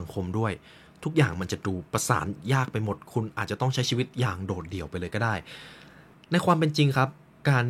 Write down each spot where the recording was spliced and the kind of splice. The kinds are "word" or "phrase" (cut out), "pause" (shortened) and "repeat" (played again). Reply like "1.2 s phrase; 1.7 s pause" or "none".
none